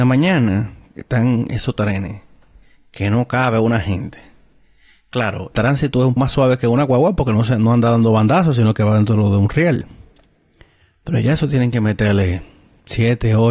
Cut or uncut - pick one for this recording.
cut